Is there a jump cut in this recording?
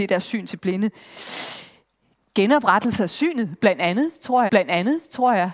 yes; 1 cut; at 4.5 s

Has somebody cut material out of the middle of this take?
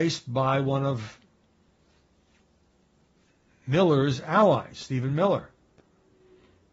no; 0 cuts

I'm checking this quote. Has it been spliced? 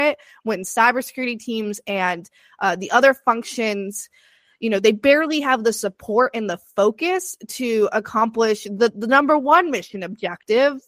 no; 0 cuts

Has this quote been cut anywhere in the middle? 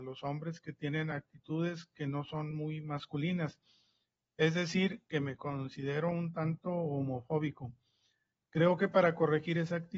no; 0 cuts

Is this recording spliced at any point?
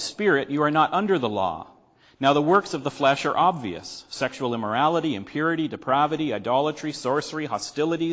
no; 0 cuts

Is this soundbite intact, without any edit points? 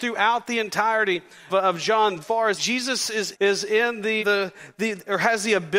no; 5 cuts; at 1.5 s, 2.2 s, 2.6 s, 3.3 s, 4.2 s

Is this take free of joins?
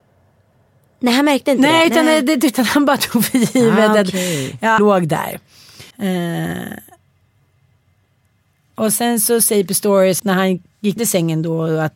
no; 4 cuts; at 4.8 s, 5.9 s, 10.2 s, 11.0 s

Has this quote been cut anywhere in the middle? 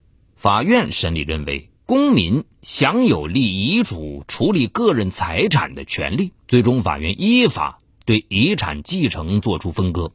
yes; 2 cuts; at 1.8 s, 6.4 s

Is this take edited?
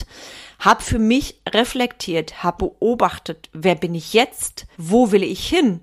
yes; 2 cuts; at 2.6 s, 4.7 s

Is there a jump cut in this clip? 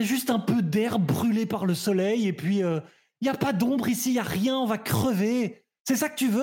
no; 0 cuts

